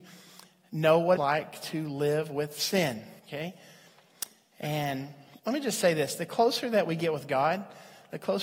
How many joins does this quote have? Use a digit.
3